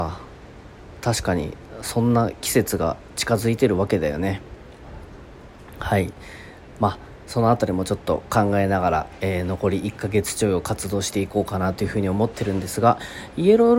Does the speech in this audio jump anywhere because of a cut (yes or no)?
no